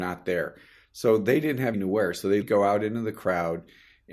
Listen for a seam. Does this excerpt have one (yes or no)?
yes